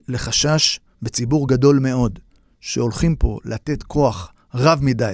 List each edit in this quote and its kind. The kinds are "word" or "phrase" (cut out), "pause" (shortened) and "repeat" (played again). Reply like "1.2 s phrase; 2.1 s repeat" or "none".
none